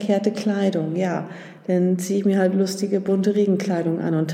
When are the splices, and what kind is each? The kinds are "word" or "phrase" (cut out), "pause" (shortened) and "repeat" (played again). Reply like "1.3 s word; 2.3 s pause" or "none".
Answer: none

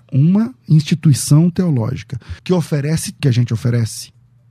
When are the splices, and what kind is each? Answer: 2.4 s pause; 3.2 s word

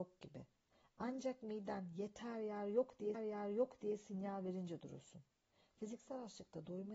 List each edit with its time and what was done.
3.1 s repeat

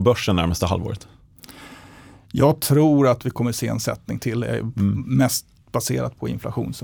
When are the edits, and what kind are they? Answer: none

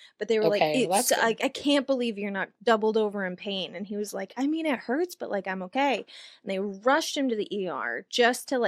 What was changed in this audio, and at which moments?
none

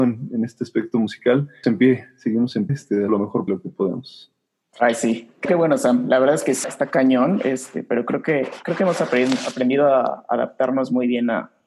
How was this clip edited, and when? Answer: 1.6 s word; 2.7 s word; 3.1 s word; 3.5 s word; 5.4 s word; 6.6 s word

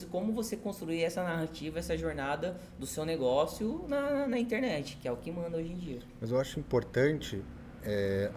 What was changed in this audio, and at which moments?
none

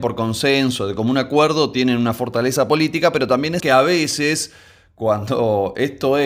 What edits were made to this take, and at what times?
3.6 s word

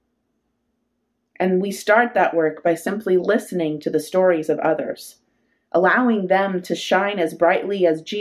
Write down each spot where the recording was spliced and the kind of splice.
none

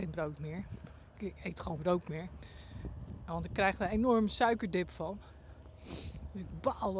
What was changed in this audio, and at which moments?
1.8 s word

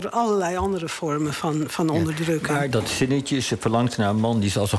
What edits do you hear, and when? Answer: 2.7 s word

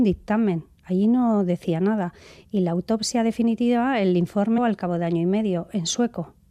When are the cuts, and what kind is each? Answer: 4.6 s phrase

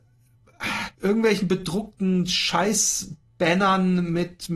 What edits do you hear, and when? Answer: 0.9 s pause

